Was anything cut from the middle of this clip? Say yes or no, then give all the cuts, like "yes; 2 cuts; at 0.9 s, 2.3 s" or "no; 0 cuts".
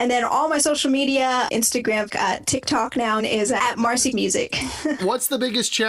yes; 6 cuts; at 1.5 s, 2.1 s, 3.2 s, 3.6 s, 4.1 s, 5.0 s